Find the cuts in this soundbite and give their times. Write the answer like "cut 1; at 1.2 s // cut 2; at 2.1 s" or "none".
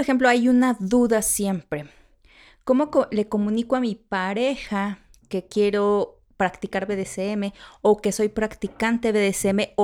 none